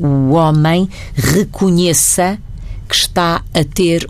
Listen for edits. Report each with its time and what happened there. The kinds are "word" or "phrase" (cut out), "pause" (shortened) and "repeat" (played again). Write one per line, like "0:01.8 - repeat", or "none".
none

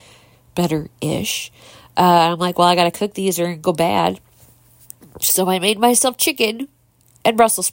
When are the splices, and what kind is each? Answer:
none

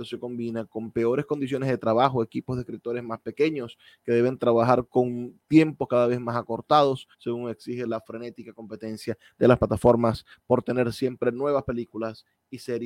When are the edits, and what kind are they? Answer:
0:07.1 - pause

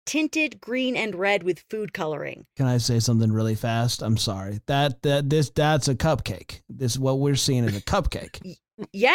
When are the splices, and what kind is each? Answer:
0:04.2 - word

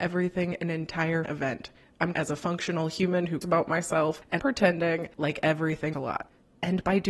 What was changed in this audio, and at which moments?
0:01.2 - word
0:02.1 - word
0:03.4 - word
0:04.4 - word
0:05.9 - word

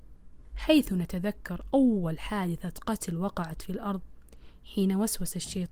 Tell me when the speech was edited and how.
none

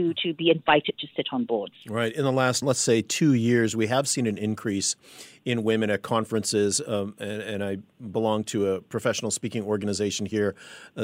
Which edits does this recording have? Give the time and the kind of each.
0:02.6 - word

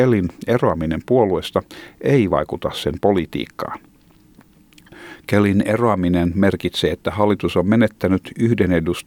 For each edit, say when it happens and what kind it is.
none

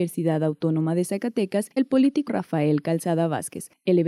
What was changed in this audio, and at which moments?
0:01.8 - word
0:02.3 - word

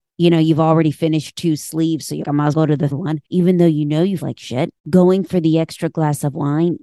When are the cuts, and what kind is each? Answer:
0:02.2 - word
0:02.5 - word
0:02.9 - word
0:03.2 - pause
0:04.2 - word
0:04.8 - pause

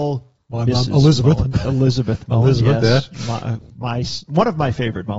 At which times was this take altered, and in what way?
none

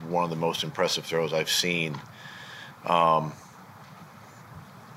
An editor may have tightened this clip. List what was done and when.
none

